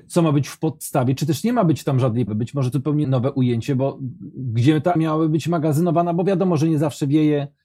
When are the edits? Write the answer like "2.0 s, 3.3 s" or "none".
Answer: 2.3 s, 2.7 s, 3.0 s, 5.0 s